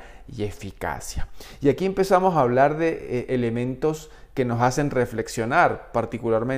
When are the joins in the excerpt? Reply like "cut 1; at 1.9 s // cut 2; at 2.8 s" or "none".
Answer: none